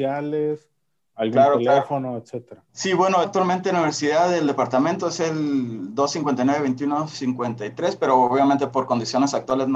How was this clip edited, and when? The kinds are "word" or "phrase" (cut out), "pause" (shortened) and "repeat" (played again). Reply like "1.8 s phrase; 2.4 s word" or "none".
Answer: 2.7 s pause; 3.2 s phrase